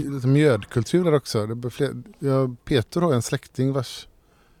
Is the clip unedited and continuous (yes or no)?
yes